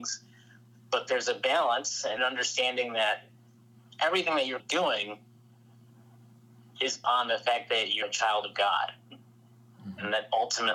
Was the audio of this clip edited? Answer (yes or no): yes